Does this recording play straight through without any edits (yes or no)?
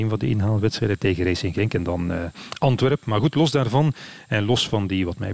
yes